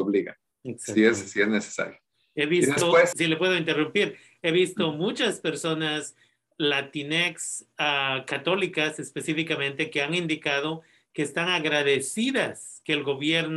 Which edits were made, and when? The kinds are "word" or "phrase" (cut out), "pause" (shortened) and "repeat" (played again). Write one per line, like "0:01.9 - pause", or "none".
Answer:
0:03.1 - word